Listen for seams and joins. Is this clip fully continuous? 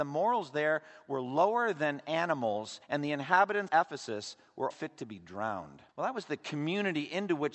no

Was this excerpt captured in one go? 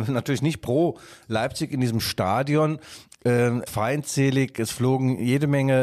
no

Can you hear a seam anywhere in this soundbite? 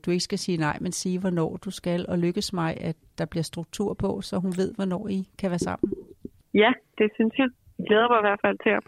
no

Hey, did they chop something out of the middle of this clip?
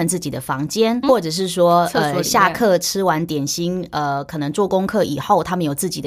yes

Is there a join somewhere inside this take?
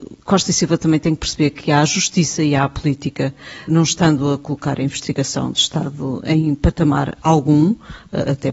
yes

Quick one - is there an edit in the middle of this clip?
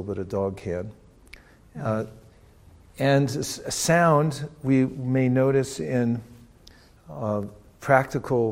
no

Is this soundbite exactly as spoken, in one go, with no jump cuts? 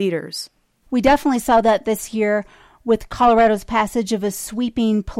yes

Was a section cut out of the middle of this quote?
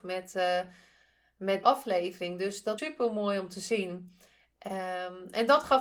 yes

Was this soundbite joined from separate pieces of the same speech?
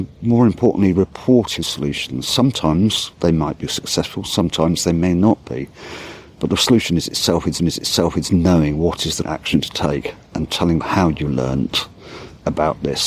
yes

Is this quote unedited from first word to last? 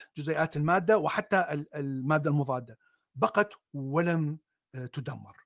yes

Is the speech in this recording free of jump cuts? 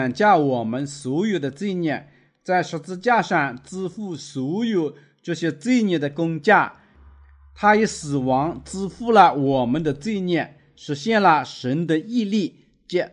yes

